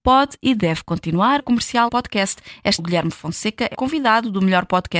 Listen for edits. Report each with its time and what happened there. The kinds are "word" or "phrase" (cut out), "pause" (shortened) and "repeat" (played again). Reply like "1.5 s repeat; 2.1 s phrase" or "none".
1.4 s phrase; 1.9 s word; 2.8 s word; 3.7 s word